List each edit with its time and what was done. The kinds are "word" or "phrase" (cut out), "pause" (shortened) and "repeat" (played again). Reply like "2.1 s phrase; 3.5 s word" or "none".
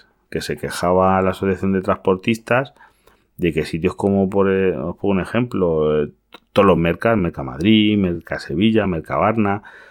none

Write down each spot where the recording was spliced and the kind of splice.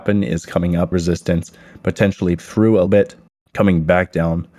0.9 s word; 2.4 s word; 2.9 s word

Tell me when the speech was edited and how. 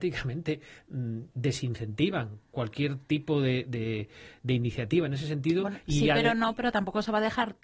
4.4 s word

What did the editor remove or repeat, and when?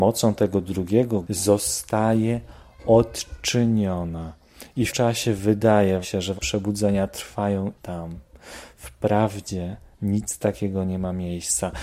1.2 s word; 4.9 s phrase; 6.0 s word; 6.4 s word; 7.8 s word

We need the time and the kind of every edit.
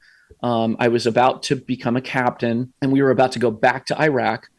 2.8 s pause

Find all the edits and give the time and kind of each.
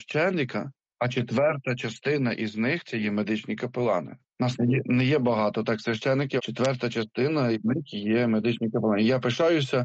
6.4 s word

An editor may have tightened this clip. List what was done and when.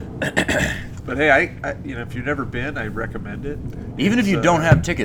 none

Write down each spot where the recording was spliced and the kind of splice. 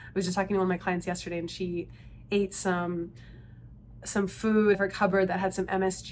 4.7 s word

